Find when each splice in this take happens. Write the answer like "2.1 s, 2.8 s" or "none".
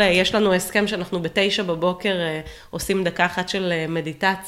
none

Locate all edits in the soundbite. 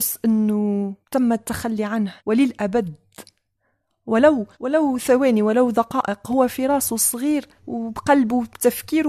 1.0 s, 2.2 s, 4.5 s, 7.6 s

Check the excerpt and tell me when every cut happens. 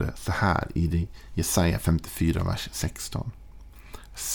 none

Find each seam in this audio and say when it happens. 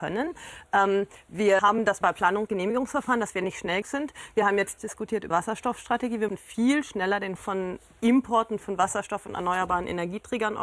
1.6 s, 2.0 s, 2.5 s, 3.8 s, 4.8 s, 5.3 s, 6.3 s, 7.4 s

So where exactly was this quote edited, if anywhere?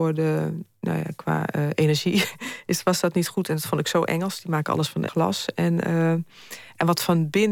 5.1 s

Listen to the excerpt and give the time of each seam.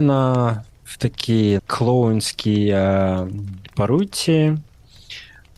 1.6 s

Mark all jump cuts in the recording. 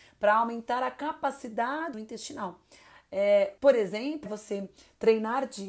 1.9 s, 3.6 s, 4.3 s

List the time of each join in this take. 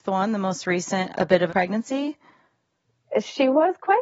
1.1 s, 1.5 s

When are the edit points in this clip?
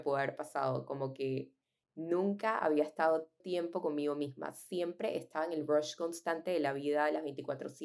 3.4 s

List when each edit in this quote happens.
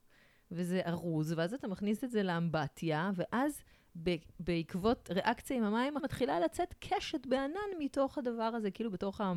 6.0 s

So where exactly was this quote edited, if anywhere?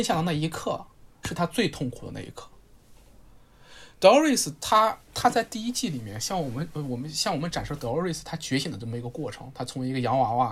5.0 s

